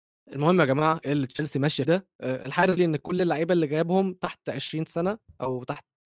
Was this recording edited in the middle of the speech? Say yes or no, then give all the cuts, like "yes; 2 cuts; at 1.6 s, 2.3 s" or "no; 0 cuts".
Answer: yes; 3 cuts; at 1.0 s, 1.8 s, 2.8 s